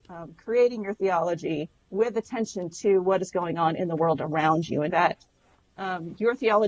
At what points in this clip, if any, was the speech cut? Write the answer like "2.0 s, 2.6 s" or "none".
1.8 s, 4.9 s